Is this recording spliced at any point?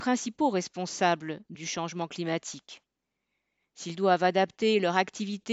yes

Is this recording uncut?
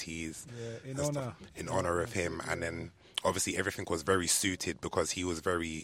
yes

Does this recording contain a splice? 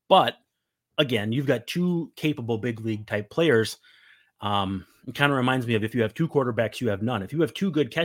no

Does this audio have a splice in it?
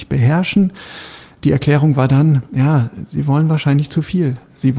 no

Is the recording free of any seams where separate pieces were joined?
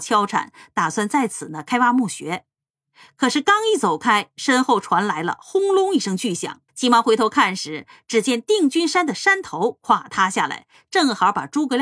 no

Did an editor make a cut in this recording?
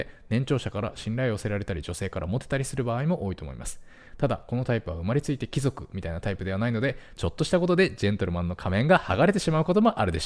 no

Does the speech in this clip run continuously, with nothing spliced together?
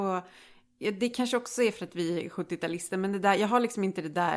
yes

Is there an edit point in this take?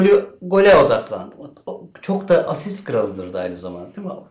no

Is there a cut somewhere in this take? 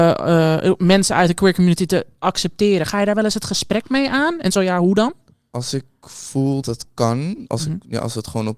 yes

